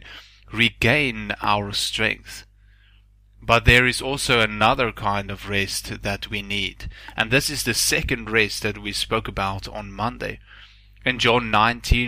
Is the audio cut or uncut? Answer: uncut